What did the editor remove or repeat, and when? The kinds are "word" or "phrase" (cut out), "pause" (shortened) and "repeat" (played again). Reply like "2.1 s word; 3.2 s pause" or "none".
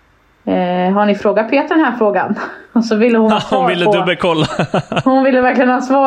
2.6 s pause; 3.3 s word